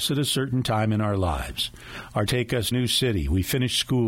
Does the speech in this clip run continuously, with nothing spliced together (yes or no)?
no